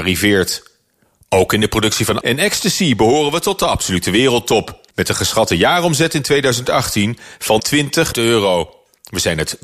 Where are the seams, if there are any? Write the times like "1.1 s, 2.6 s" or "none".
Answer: 2.2 s, 4.9 s, 7.6 s, 8.1 s